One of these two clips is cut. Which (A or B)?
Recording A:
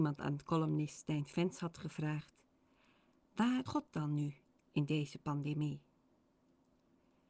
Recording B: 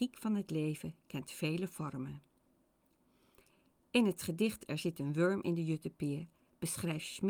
A